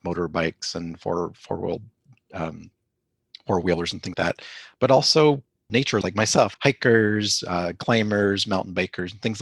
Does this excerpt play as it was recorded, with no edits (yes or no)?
no